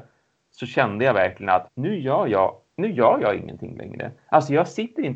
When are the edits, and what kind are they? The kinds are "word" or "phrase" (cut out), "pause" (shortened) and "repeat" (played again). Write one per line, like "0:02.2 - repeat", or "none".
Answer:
0:01.7 - word